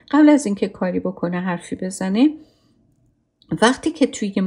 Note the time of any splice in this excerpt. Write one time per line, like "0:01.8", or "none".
none